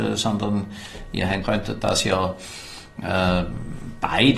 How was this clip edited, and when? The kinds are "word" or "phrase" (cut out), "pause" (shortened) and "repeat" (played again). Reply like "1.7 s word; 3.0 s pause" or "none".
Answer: 1.4 s phrase

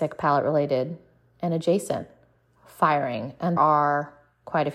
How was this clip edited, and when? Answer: 2.4 s pause; 3.6 s word

